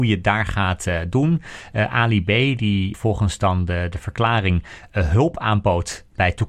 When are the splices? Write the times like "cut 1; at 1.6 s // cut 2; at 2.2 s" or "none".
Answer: none

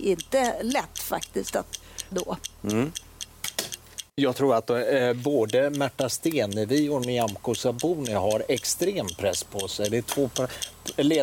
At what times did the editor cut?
cut 1; at 2.1 s // cut 2; at 4.1 s

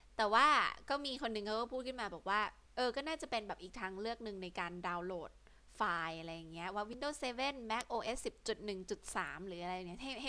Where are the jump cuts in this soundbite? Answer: cut 1; at 2.6 s

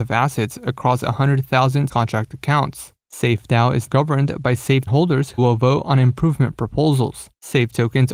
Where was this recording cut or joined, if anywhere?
cut 1; at 1.9 s // cut 2; at 3.9 s // cut 3; at 4.9 s // cut 4; at 5.4 s

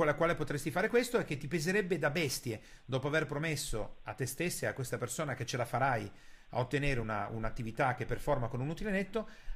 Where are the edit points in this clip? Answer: none

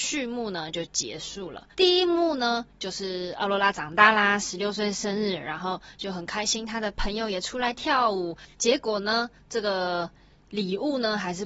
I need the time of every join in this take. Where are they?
cut 1; at 1.7 s // cut 2; at 8.5 s

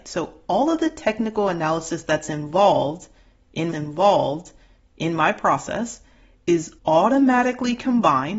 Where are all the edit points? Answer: cut 1; at 3.7 s // cut 2; at 6.8 s

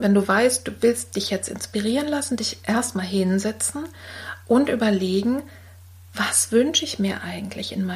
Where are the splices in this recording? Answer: none

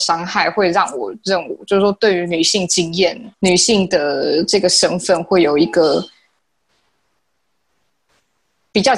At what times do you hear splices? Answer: cut 1; at 3.3 s

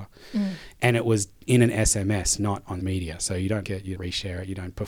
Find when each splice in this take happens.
cut 1; at 2.8 s // cut 2; at 3.6 s // cut 3; at 3.9 s

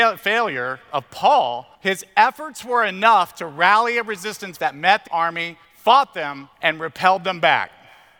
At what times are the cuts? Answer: cut 1; at 1.7 s // cut 2; at 4.6 s // cut 3; at 5.1 s // cut 4; at 5.6 s // cut 5; at 6.5 s

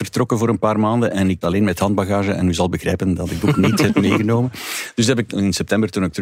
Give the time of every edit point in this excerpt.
cut 1; at 1.4 s // cut 2; at 3.4 s // cut 3; at 5.3 s

